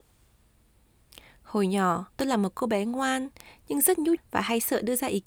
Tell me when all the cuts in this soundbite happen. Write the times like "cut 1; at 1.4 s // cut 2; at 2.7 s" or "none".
cut 1; at 2.1 s // cut 2; at 4.2 s